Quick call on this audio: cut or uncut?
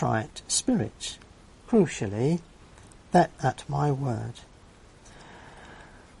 cut